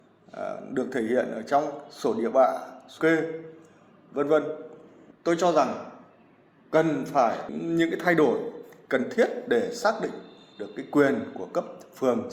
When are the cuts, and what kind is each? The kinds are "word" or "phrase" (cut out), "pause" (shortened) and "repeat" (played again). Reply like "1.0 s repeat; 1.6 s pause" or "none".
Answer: 3.0 s word; 10.5 s pause